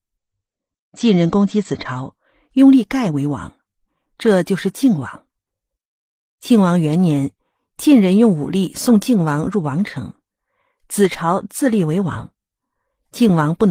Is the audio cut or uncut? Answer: uncut